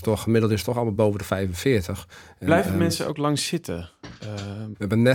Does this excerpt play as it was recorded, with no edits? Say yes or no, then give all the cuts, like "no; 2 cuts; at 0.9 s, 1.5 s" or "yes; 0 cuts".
yes; 0 cuts